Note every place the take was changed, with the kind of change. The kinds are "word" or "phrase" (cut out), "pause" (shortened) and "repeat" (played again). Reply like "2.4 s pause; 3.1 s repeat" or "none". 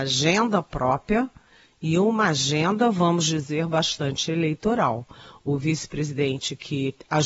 none